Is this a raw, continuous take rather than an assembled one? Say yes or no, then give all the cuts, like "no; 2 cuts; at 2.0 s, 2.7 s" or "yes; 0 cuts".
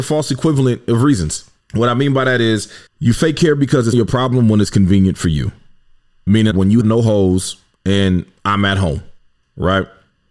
no; 5 cuts; at 1.6 s, 2.9 s, 3.9 s, 6.5 s, 6.8 s